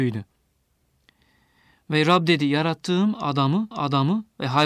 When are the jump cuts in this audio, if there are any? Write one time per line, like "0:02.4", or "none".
0:03.7